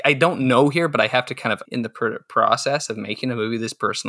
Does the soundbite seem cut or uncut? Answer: cut